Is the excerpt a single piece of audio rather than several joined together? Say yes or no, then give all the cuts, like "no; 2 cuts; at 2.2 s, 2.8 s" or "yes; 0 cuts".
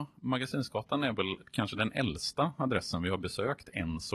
yes; 0 cuts